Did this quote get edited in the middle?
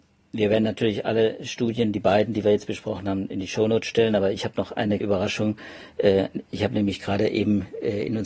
yes; 1 cut; at 5.0 s

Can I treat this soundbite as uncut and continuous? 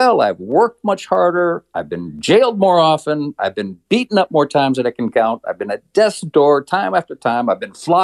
yes; 0 cuts

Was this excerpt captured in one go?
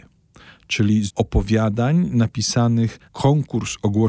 no; 2 cuts; at 1.1 s, 3.0 s

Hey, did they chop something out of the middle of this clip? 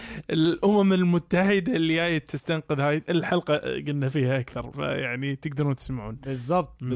no; 0 cuts

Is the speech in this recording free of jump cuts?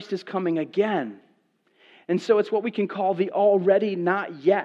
yes; 0 cuts

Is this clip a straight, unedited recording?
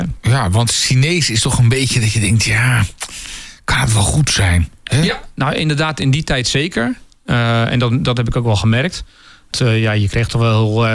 yes; 0 cuts

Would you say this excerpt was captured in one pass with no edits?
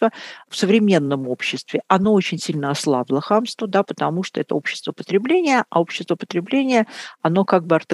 yes; 0 cuts

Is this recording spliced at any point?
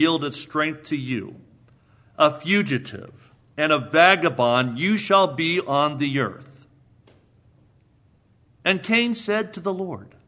no; 0 cuts

